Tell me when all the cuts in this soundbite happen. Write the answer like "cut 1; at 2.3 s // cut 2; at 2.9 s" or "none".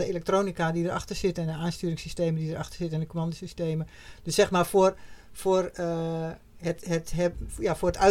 none